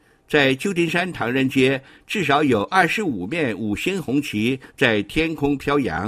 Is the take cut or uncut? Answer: uncut